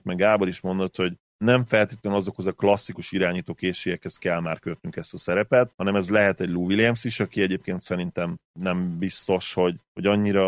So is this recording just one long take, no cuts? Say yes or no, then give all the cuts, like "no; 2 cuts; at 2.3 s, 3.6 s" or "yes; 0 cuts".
yes; 0 cuts